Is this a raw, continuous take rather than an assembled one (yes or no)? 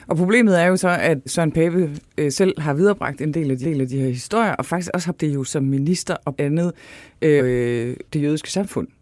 no